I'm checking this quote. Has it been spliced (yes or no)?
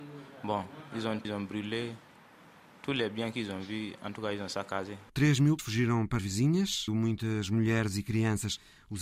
yes